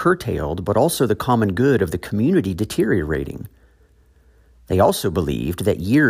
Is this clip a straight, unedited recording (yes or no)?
yes